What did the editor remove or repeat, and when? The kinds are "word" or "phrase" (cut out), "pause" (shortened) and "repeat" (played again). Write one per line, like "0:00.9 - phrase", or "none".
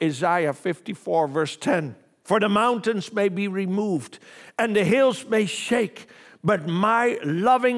none